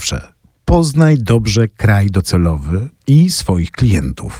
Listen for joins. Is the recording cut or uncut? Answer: uncut